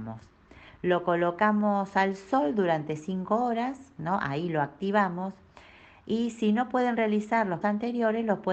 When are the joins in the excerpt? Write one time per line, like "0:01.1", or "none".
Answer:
0:07.6